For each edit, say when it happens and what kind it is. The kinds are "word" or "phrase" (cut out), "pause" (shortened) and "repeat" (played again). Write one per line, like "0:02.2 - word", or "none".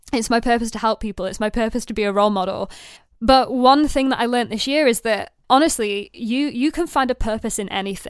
0:03.0 - pause